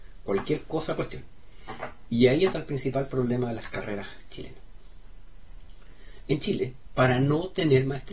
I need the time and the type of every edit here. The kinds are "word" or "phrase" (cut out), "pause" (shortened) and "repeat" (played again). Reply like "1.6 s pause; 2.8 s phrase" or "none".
1.0 s phrase; 2.5 s phrase; 6.9 s phrase

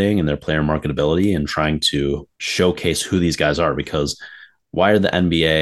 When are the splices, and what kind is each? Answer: 2.3 s pause

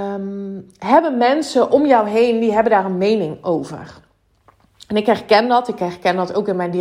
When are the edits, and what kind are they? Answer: none

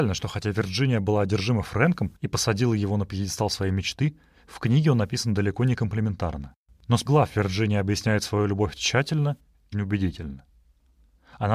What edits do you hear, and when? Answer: 2.2 s pause; 7.1 s word; 9.7 s word

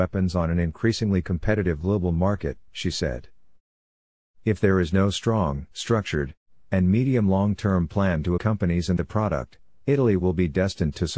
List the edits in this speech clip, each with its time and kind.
2.7 s pause; 5.7 s pause; 8.4 s word; 9.0 s word

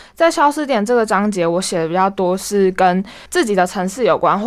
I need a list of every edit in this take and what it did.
3.3 s pause

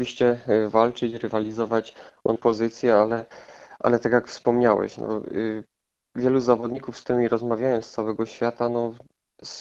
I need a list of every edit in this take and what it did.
2.4 s word

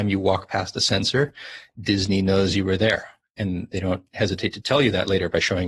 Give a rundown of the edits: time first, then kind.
none

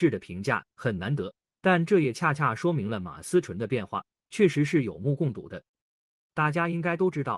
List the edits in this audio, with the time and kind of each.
none

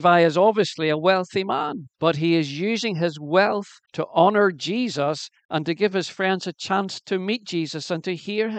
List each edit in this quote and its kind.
1.9 s pause; 3.8 s pause

